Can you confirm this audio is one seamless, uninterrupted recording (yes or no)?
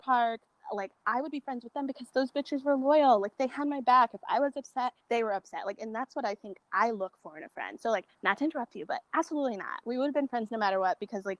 no